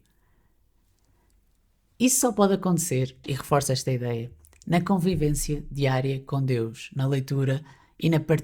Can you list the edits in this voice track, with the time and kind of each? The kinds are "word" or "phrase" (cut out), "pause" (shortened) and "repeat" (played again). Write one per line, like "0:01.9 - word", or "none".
0:03.2 - word